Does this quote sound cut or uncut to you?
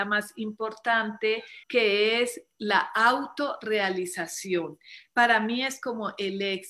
cut